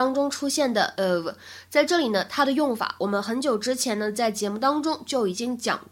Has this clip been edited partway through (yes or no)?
yes